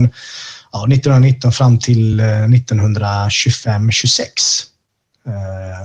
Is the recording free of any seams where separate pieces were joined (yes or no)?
yes